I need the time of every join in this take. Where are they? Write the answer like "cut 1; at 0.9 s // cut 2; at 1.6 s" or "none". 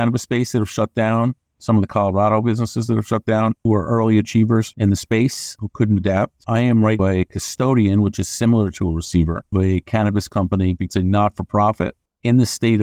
cut 1; at 3.7 s // cut 2; at 7.0 s // cut 3; at 9.5 s // cut 4; at 10.9 s